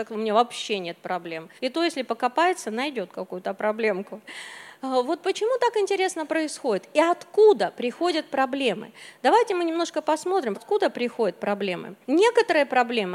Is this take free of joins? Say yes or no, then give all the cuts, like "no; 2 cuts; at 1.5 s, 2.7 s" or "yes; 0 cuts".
no; 3 cuts; at 1.6 s, 10.5 s, 12.0 s